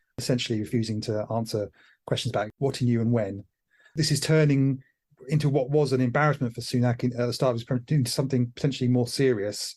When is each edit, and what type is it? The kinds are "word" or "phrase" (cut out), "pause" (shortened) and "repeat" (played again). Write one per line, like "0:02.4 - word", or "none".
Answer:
none